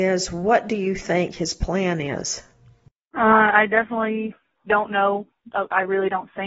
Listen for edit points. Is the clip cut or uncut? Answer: cut